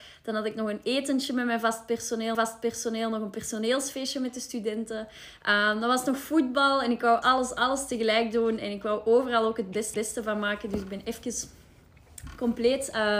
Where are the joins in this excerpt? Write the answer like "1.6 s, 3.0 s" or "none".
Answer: 2.3 s, 7.2 s, 9.9 s

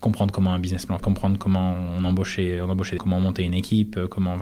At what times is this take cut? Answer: 1.0 s, 3.0 s

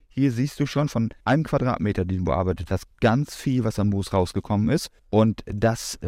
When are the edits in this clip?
1.2 s, 5.0 s

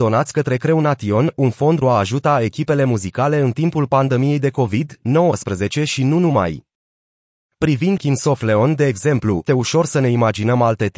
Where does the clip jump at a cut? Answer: 1.8 s, 8.0 s, 9.5 s

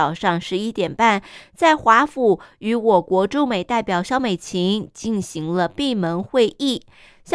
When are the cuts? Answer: none

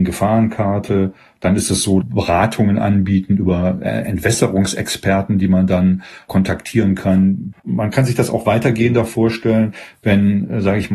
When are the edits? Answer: 2.0 s, 7.6 s

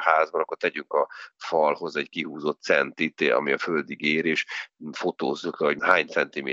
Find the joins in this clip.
none

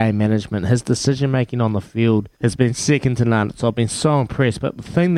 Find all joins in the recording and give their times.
2.3 s

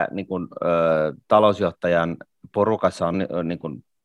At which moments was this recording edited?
3.1 s

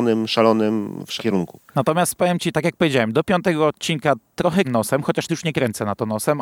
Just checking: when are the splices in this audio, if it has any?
1.2 s, 1.7 s, 2.5 s, 4.6 s, 5.3 s

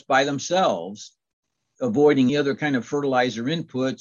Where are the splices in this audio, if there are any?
2.3 s

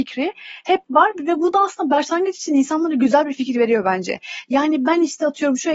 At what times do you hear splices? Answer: none

